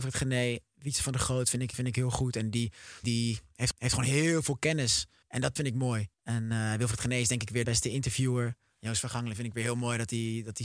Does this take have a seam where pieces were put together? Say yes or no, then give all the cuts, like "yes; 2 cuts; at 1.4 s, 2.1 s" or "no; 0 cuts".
yes; 7 cuts; at 1.7 s, 3.0 s, 3.7 s, 5.2 s, 5.6 s, 6.1 s, 7.6 s